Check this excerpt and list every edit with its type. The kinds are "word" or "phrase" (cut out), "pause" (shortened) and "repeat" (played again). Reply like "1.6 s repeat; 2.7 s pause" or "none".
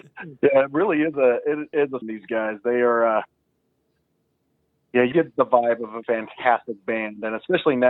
2.0 s phrase; 5.1 s word; 6.0 s word